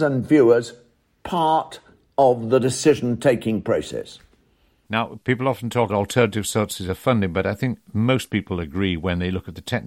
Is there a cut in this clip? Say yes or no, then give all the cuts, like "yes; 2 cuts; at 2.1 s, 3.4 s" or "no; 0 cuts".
yes; 1 cut; at 5.9 s